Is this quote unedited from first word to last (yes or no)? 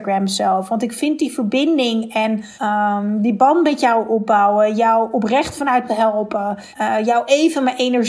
no